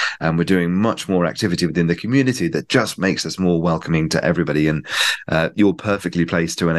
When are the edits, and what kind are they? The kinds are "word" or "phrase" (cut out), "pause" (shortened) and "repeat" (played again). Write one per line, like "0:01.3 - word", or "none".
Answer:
none